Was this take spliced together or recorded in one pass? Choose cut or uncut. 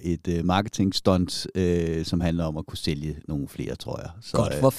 uncut